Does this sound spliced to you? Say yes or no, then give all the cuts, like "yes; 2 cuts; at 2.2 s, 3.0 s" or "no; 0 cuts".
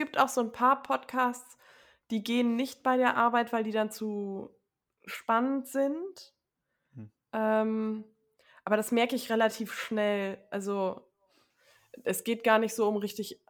no; 0 cuts